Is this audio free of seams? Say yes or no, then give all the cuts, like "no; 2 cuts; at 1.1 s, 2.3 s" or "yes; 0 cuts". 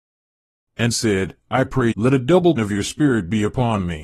no; 3 cuts; at 0.9 s, 1.9 s, 2.6 s